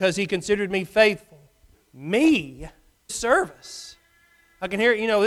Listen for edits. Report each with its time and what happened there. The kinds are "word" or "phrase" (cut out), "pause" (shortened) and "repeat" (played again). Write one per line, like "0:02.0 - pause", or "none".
0:01.7 - word
0:03.1 - word